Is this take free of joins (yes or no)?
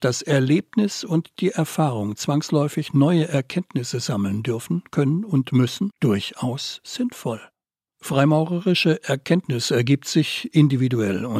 yes